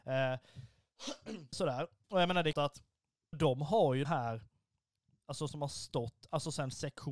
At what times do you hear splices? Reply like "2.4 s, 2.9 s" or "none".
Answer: 1.5 s, 2.5 s, 3.3 s, 4.0 s, 5.5 s